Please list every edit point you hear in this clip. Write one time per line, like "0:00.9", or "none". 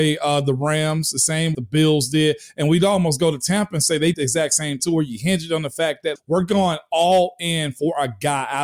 0:01.5
0:04.1
0:04.8
0:06.2